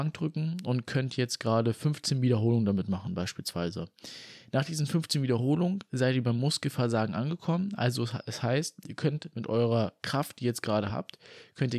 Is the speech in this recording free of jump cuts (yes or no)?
yes